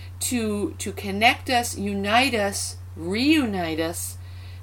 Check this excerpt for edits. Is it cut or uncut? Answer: uncut